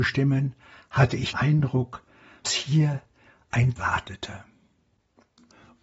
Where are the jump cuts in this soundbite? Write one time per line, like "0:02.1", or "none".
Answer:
0:01.3
0:02.4
0:03.8